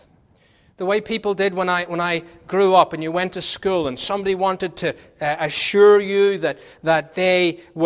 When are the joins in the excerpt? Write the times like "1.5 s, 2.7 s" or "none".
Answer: none